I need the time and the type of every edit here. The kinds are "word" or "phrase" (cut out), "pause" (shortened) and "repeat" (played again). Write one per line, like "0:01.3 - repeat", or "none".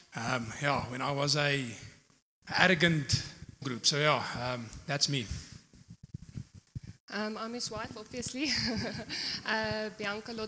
0:03.6 - phrase